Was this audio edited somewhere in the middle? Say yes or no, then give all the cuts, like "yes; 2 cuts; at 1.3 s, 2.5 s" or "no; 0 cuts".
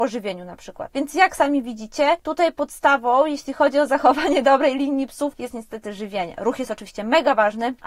no; 0 cuts